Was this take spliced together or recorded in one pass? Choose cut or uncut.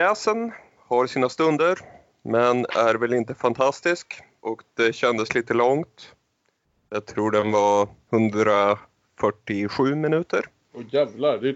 uncut